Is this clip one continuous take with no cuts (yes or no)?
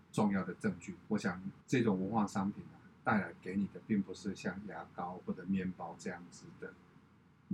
no